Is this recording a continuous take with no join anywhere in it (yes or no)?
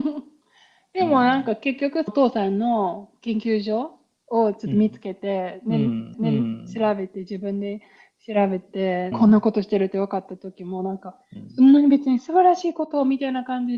no